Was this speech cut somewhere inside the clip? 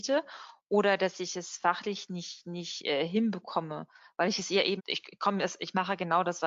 yes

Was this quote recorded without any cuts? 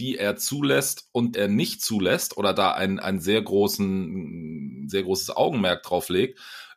no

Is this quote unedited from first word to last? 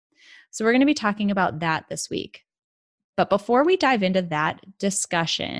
yes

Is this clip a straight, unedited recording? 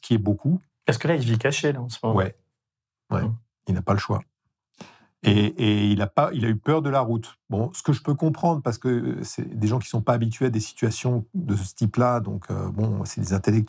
yes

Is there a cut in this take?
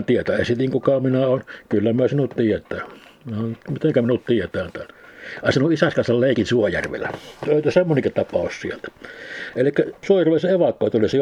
yes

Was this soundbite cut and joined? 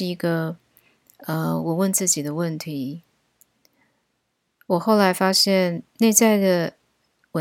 no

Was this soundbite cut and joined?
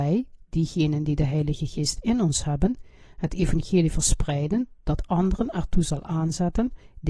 no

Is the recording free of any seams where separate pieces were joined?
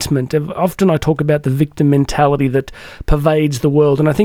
yes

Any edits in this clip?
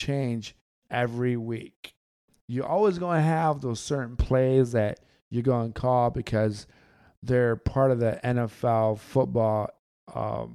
no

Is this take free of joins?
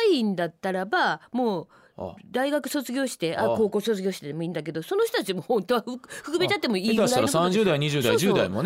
yes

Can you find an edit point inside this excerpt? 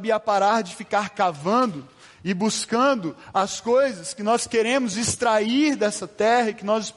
no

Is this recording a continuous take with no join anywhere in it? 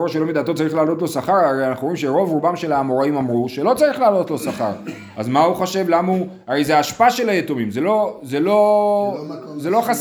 yes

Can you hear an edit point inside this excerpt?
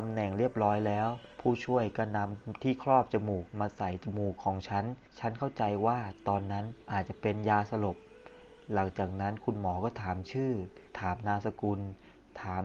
yes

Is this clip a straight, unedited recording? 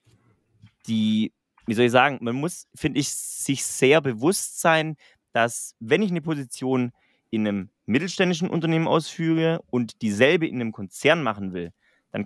yes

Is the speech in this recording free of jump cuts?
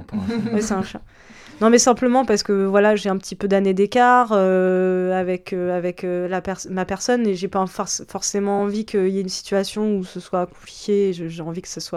yes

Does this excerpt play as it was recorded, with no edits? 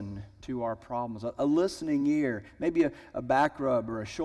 yes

